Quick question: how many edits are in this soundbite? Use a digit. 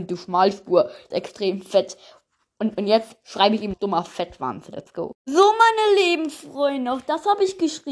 2